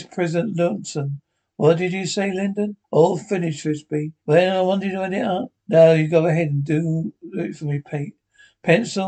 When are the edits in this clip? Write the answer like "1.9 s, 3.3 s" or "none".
2.8 s, 4.2 s, 5.6 s